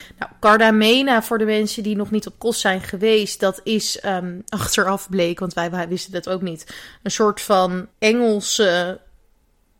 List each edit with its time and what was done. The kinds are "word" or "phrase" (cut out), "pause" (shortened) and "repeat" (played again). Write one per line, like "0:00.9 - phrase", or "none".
0:07.9 - pause